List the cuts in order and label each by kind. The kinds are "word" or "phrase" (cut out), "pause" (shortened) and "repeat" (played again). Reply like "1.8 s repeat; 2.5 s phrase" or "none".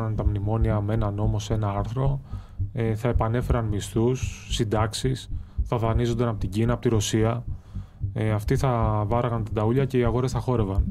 none